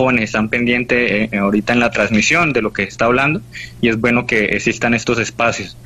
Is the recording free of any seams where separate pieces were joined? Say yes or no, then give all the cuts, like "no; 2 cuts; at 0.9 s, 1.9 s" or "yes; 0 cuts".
yes; 0 cuts